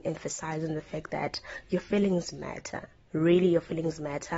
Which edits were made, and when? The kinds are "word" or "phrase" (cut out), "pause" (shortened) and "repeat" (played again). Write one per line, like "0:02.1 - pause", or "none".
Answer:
none